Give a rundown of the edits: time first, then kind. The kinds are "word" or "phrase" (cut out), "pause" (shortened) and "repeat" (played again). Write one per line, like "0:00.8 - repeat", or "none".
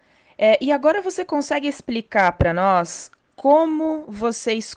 none